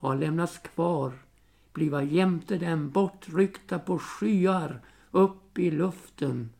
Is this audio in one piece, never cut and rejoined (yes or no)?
yes